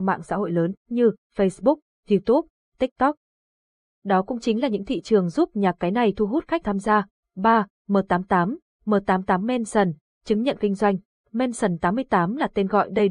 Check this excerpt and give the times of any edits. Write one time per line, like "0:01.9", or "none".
0:06.6